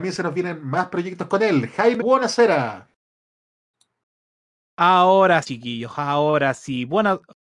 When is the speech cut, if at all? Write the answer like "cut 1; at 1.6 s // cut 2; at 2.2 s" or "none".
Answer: cut 1; at 2.0 s // cut 2; at 5.4 s